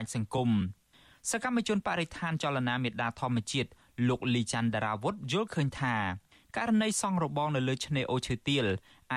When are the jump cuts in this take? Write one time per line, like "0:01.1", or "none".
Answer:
none